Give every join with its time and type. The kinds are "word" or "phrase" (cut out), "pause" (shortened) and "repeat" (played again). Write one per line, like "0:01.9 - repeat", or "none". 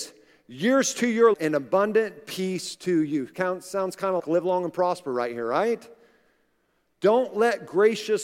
0:01.3 - word
0:04.2 - word